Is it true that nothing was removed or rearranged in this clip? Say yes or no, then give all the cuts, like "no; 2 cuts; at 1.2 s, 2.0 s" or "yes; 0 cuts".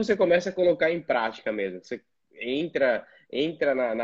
yes; 0 cuts